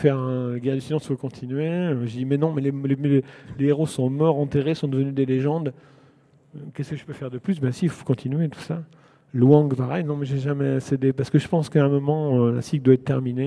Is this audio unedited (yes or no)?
yes